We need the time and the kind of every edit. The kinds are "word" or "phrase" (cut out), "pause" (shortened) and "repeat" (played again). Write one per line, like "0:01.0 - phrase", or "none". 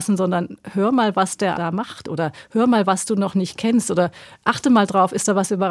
0:01.5 - word